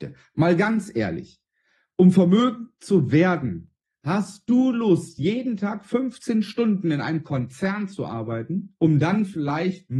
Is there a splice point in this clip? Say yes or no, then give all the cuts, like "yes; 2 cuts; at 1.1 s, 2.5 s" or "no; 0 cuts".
no; 0 cuts